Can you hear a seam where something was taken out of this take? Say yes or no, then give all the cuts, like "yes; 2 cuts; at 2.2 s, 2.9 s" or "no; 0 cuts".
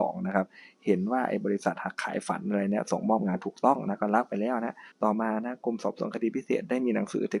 yes; 1 cut; at 4.9 s